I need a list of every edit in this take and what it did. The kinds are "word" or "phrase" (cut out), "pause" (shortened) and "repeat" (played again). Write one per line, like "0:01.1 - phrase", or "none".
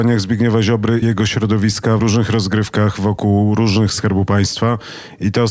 0:01.0 - word
0:02.0 - word
0:03.9 - word